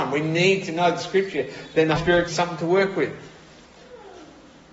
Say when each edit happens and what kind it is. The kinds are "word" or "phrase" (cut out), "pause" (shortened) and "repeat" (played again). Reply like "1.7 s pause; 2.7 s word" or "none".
2.0 s word; 2.3 s word